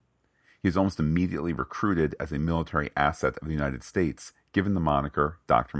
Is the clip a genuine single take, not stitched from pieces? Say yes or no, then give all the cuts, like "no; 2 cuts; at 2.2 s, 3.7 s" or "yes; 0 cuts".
yes; 0 cuts